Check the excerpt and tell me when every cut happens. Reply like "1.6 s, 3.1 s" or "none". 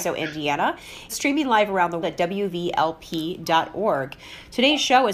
1.1 s, 2.0 s